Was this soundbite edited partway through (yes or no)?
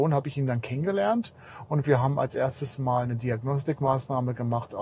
no